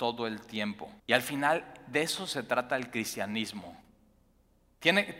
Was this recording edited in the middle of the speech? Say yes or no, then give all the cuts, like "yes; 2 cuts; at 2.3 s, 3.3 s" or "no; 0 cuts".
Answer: yes; 1 cut; at 1.0 s